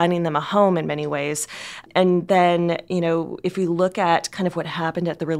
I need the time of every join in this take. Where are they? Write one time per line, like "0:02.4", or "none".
none